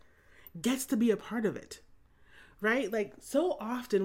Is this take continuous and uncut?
yes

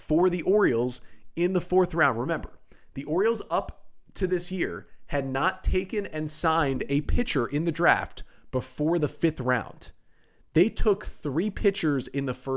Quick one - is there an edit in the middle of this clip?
no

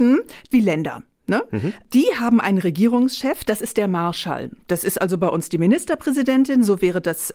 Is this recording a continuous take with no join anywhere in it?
yes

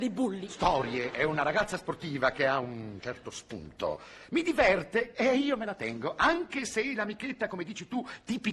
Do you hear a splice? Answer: no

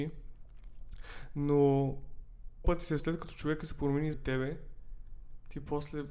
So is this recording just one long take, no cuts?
no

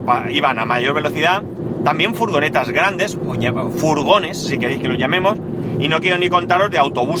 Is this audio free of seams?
yes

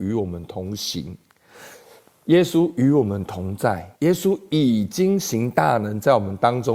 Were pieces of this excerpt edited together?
yes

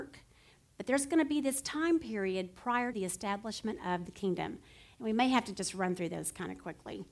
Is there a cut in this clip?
yes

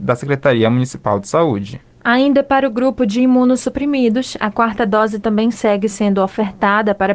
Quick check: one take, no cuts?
yes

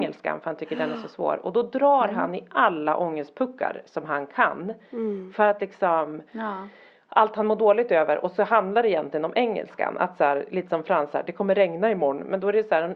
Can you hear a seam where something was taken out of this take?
no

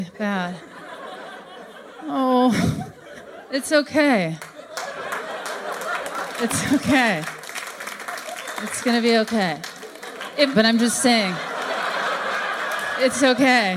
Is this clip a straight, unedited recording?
no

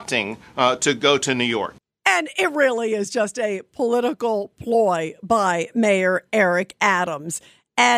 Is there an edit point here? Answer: yes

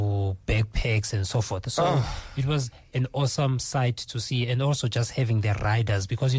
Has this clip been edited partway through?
no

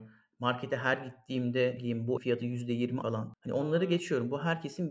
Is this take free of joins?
no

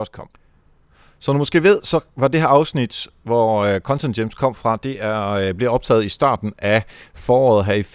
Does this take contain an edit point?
no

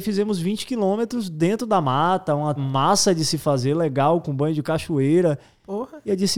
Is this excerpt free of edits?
no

